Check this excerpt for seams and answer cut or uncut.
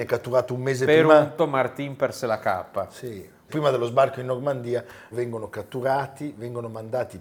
cut